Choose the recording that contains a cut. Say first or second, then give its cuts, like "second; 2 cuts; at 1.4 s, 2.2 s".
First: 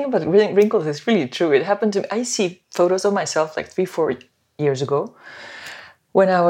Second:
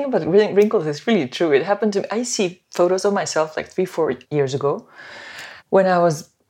second; 2 cuts; at 4.2 s, 5.6 s